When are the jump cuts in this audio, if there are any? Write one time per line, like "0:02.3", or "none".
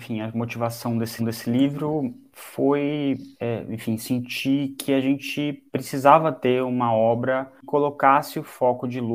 0:01.2
0:03.3
0:05.7
0:07.6